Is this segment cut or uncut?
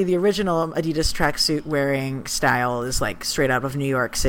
uncut